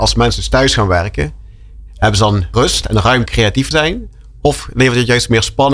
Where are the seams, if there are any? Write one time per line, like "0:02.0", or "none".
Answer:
0:02.5
0:03.3
0:03.7